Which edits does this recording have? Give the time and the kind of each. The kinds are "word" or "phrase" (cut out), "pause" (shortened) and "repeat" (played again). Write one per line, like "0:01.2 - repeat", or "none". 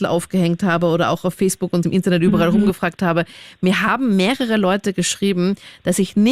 0:01.8 - word